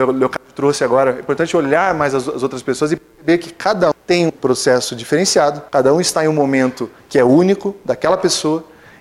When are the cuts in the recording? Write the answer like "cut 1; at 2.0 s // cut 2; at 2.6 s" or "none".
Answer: cut 1; at 3.9 s // cut 2; at 4.3 s // cut 3; at 5.7 s